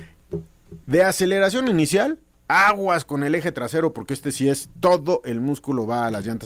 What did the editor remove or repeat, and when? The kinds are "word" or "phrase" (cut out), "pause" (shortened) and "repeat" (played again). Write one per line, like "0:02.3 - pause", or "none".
none